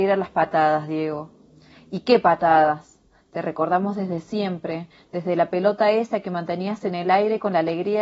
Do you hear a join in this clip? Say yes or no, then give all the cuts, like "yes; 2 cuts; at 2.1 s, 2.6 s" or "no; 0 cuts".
no; 0 cuts